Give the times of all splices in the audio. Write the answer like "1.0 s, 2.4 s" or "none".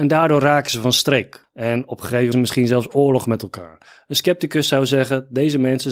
2.3 s